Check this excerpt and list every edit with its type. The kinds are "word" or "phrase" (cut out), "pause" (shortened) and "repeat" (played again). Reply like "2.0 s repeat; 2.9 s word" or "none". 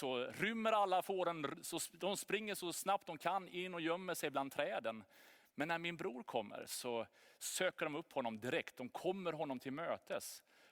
none